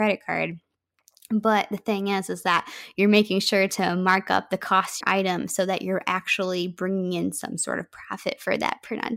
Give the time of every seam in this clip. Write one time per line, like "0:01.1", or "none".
0:05.0